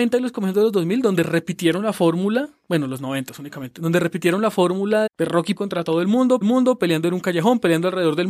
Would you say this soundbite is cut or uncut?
cut